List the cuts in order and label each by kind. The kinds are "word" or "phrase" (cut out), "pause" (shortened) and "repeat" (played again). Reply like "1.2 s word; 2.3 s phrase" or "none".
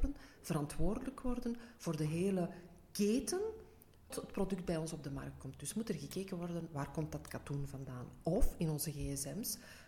4.1 s phrase